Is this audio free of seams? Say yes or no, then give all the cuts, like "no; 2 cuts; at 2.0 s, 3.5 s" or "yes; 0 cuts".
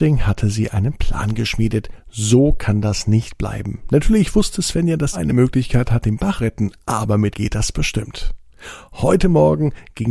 no; 3 cuts; at 5.1 s, 6.4 s, 7.3 s